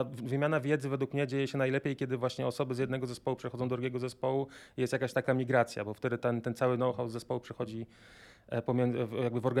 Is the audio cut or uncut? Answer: uncut